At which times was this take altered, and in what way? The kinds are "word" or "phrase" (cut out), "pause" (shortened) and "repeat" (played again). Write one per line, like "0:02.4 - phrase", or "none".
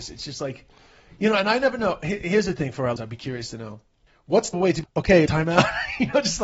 0:03.0 - word
0:04.1 - pause
0:04.5 - word
0:04.8 - word
0:05.3 - word